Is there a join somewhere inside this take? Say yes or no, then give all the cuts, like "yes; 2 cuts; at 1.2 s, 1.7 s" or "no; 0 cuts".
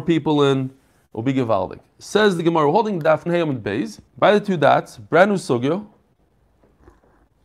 yes; 2 cuts; at 3.3 s, 4.1 s